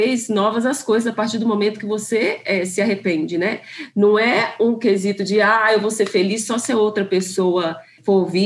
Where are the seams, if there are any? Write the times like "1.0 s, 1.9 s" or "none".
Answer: none